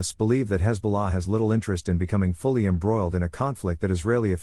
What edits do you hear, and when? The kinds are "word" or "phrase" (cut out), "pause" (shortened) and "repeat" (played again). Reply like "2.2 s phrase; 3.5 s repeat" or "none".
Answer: none